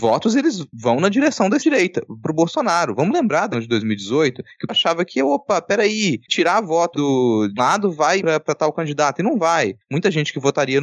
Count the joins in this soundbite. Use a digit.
8